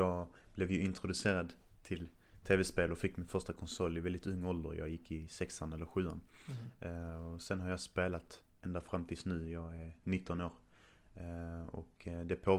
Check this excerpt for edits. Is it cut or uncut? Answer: uncut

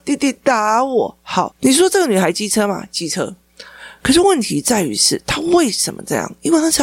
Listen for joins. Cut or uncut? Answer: uncut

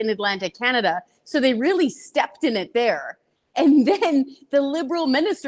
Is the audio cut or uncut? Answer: uncut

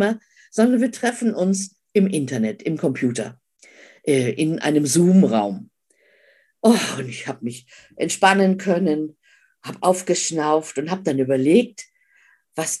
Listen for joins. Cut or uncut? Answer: uncut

